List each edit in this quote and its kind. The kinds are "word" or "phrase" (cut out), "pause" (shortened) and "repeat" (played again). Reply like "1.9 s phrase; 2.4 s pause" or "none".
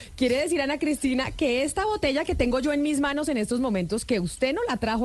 none